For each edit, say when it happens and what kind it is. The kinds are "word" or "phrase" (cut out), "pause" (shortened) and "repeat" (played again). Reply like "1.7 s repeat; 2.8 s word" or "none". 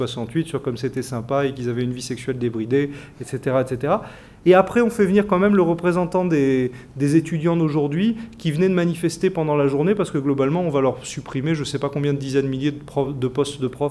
none